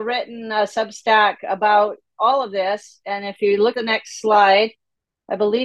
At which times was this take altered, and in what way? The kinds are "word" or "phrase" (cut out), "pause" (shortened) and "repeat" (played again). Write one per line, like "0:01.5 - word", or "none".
0:03.7 - word

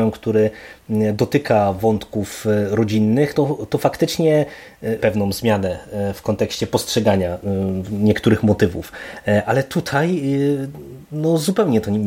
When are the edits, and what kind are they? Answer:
0:03.3 - word
0:05.0 - word

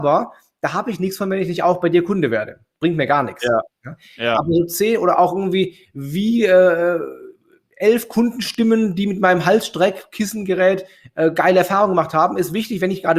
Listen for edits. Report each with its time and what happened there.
none

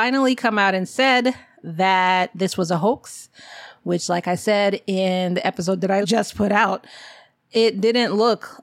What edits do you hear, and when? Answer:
0:06.0 - word

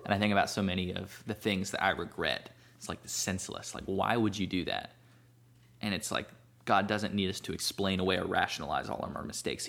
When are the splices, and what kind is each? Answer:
none

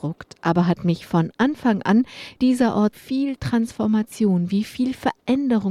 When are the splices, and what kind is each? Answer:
0:02.4 - word
0:02.9 - phrase

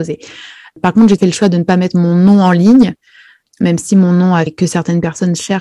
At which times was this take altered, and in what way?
0:01.2 - word
0:04.5 - word

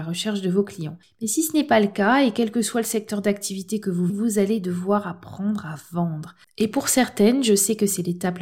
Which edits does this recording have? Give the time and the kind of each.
0:04.1 - word

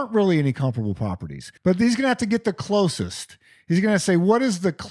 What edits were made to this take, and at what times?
0:01.6 - pause

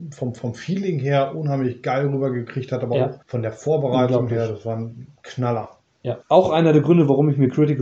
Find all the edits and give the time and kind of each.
0:03.2 - pause
0:06.2 - pause

